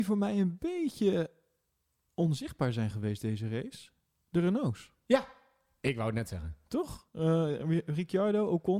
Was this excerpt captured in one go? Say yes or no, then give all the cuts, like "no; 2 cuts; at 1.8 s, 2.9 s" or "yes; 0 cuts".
yes; 0 cuts